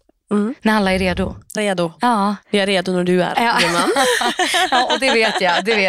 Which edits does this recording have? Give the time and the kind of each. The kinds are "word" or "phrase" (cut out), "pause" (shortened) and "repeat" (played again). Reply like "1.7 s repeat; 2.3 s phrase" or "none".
1.6 s phrase; 2.4 s pause

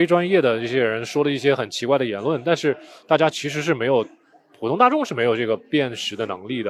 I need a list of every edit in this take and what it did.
none

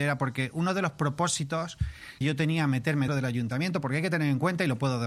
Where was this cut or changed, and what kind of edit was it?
2.2 s word; 3.1 s word

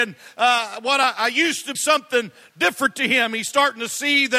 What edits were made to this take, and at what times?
1.2 s word; 1.7 s word

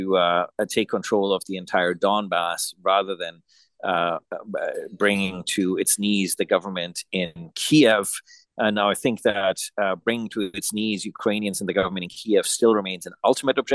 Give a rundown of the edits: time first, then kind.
none

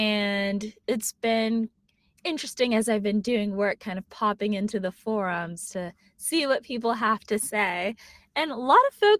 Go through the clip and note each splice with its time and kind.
none

